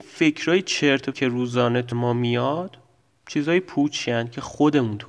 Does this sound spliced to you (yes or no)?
yes